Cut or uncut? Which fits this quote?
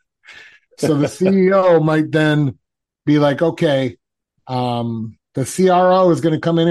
uncut